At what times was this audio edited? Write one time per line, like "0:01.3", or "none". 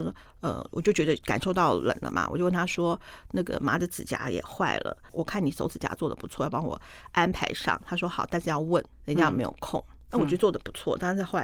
0:08.9